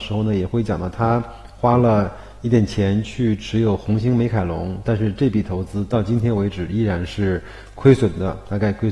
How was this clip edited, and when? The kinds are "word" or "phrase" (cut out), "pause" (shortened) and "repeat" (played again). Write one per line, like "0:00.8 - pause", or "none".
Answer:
none